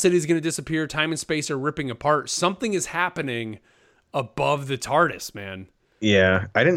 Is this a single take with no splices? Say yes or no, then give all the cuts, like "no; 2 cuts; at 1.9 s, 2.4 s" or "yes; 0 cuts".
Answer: yes; 0 cuts